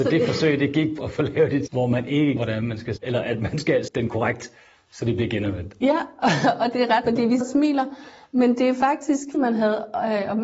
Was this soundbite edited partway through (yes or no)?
yes